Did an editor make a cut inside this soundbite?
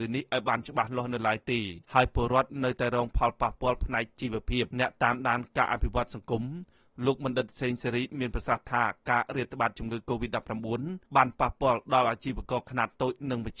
yes; 3 cuts; at 1.8 s, 4.7 s, 11.1 s

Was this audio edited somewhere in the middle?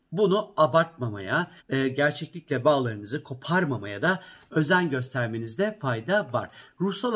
yes; 1 cut; at 1.6 s

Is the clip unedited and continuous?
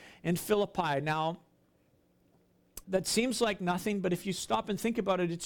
no; 1 cut; at 2.8 s

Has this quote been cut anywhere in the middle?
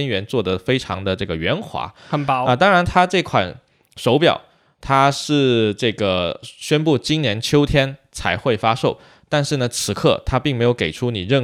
no; 0 cuts

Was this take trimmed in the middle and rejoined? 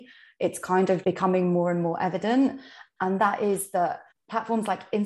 yes; 2 cuts; at 1.0 s, 4.1 s

